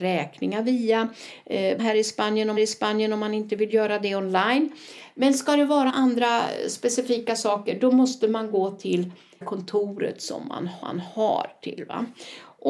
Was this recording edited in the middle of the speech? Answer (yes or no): yes